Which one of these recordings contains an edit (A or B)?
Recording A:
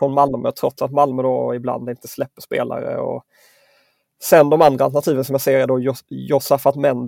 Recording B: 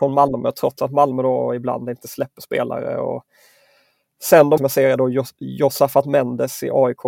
B